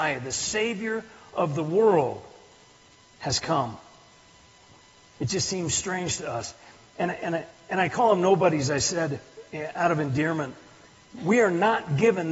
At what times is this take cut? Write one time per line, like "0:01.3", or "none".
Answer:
none